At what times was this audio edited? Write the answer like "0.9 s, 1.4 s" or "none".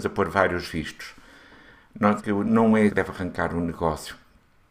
2.2 s, 2.9 s